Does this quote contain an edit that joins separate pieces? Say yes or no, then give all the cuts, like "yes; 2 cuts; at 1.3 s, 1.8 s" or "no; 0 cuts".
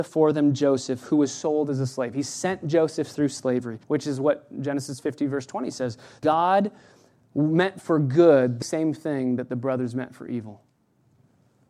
yes; 3 cuts; at 3.8 s, 6.2 s, 8.6 s